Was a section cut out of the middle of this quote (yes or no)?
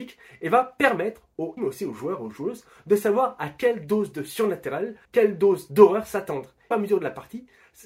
yes